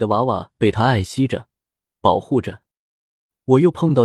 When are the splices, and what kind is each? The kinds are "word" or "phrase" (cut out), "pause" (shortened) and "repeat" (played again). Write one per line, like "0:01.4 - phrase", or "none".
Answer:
none